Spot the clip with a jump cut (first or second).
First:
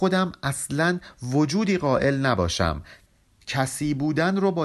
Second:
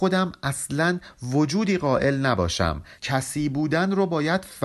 second